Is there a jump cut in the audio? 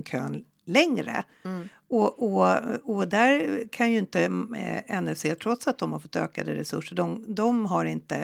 no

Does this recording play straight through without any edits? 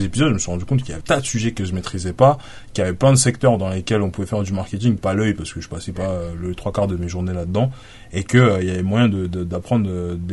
no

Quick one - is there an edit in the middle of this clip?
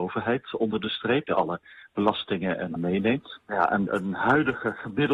yes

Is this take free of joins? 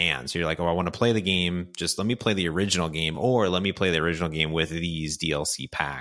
yes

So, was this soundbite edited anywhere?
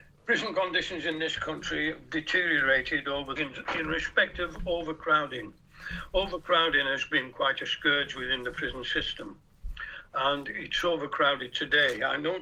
yes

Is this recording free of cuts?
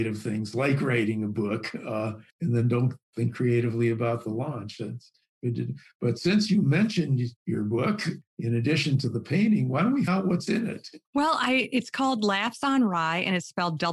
no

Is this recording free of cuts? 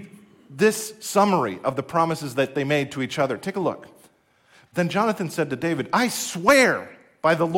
yes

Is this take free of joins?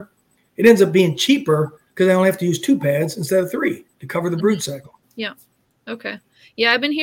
no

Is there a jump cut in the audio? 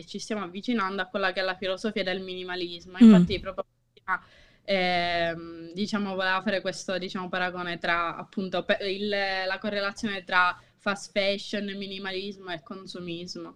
no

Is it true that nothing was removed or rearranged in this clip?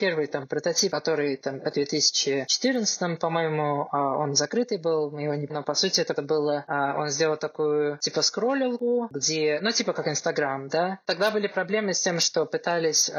no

